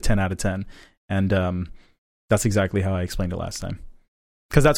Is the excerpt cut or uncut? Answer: uncut